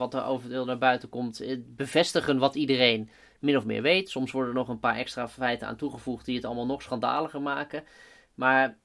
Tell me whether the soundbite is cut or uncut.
uncut